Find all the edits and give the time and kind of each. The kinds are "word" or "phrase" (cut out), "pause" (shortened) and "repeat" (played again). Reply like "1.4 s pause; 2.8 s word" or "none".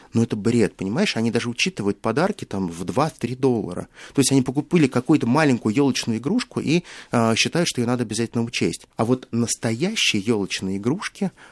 8.9 s pause